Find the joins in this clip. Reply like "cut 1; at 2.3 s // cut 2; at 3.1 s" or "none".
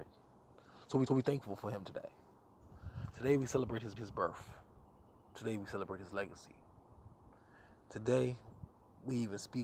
cut 1; at 1.1 s // cut 2; at 4.0 s